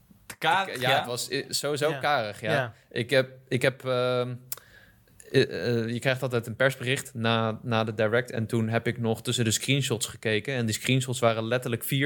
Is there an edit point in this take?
no; 0 cuts

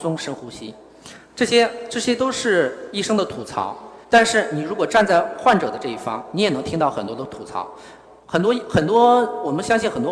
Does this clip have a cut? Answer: yes; 1 cut; at 4.0 s

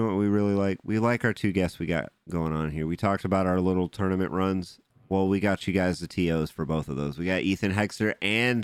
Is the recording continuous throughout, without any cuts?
yes; 0 cuts

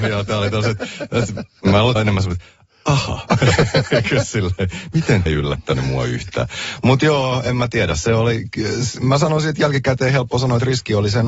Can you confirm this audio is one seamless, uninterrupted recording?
no; 2 cuts; at 2.0 s, 5.3 s

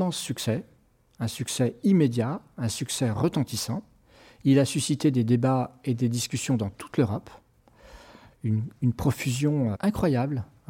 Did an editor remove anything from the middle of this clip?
yes; 1 cut; at 9.7 s

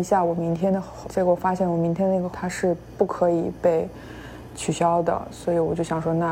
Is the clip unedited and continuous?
no; 2 cuts; at 1.0 s, 2.3 s

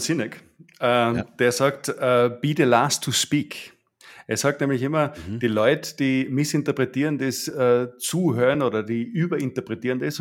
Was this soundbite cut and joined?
no; 0 cuts

